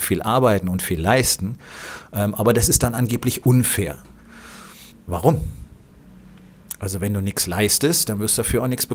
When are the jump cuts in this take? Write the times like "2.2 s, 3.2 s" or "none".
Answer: 4.9 s